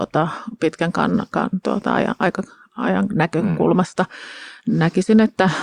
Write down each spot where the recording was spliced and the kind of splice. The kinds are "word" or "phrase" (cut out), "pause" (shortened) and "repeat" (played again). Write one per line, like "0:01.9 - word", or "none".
none